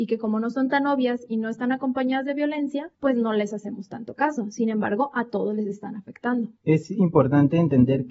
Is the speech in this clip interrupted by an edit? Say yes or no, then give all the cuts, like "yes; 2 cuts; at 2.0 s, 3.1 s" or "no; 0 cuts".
yes; 2 cuts; at 2.9 s, 6.6 s